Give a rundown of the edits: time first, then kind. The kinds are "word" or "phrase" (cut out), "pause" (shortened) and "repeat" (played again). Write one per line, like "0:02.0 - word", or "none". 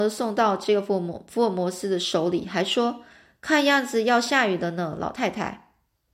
0:03.1 - pause